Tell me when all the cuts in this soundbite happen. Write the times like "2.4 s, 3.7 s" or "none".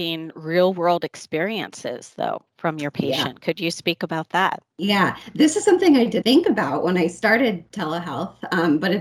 6.2 s